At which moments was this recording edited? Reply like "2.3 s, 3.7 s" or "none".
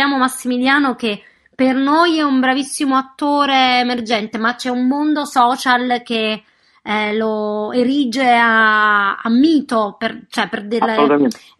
none